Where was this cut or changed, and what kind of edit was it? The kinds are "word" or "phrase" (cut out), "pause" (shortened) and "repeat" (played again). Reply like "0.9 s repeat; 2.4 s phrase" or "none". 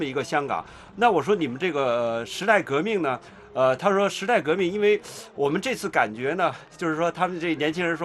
none